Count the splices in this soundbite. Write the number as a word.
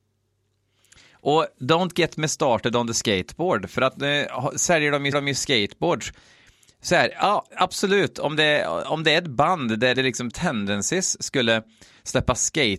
three